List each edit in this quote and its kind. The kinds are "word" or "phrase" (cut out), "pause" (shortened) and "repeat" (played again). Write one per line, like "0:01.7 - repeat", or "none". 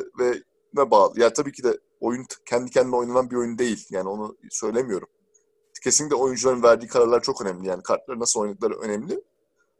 0:01.9 - pause

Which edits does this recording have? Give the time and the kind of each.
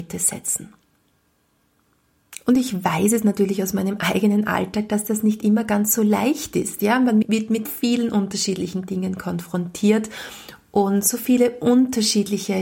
0:07.2 - word
0:07.7 - word

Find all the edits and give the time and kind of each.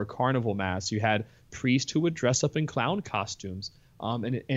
none

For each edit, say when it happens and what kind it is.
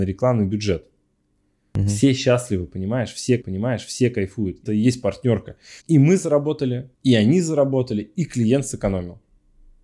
0:03.4 - repeat
0:04.7 - word
0:05.8 - pause
0:06.9 - pause

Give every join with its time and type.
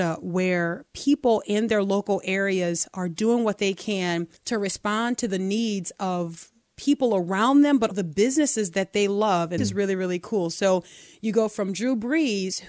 0:04.4 - pause
0:07.9 - word
0:09.6 - word

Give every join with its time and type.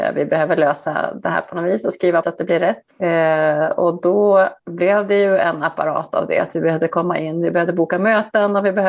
0:02.2 - phrase
0:04.6 - pause

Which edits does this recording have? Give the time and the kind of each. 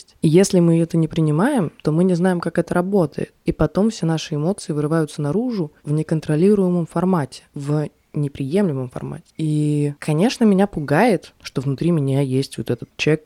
0:10.0 - pause

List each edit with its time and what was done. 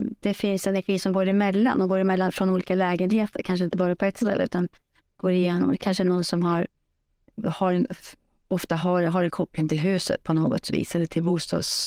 none

